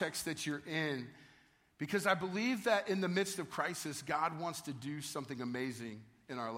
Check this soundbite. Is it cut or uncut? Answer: uncut